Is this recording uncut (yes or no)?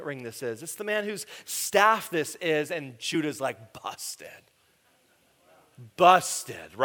yes